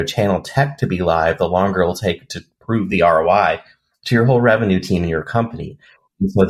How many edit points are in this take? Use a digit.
0